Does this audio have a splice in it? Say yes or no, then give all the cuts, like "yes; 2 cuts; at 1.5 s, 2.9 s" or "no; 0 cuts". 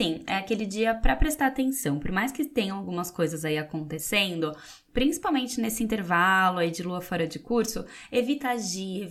no; 0 cuts